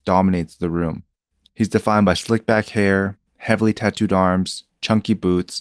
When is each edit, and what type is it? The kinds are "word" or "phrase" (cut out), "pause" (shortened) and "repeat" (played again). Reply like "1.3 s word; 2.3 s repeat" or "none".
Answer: none